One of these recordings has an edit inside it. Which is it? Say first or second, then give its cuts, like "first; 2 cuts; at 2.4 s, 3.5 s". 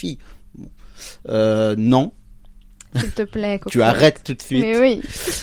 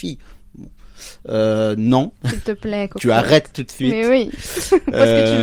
second; 1 cut; at 2.2 s